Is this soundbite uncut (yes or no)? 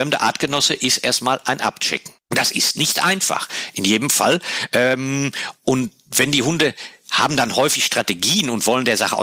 no